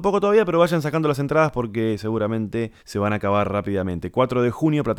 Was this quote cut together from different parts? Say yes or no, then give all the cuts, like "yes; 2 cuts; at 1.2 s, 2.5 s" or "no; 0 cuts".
yes; 1 cut; at 2.8 s